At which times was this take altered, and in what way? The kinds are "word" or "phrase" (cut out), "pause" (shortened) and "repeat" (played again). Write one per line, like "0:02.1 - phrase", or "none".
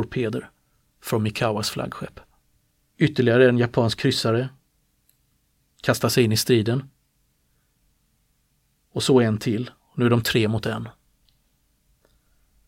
0:02.4 - pause